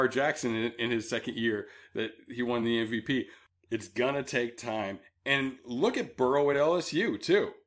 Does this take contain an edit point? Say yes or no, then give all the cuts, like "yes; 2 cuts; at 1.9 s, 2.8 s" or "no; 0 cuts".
no; 0 cuts